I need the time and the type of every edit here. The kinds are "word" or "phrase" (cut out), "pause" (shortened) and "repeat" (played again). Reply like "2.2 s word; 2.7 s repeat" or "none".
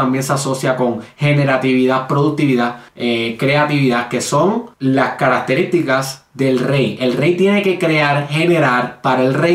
2.9 s pause; 4.7 s pause